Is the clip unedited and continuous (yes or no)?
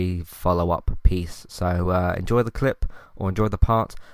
yes